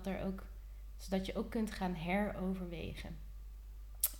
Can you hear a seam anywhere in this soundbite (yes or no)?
no